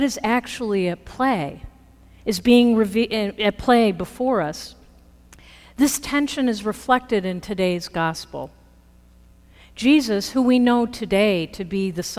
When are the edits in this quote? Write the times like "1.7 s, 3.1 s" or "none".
none